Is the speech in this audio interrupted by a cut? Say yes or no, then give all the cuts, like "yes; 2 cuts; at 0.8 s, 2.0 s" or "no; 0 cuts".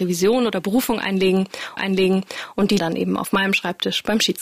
yes; 2 cuts; at 1.8 s, 2.8 s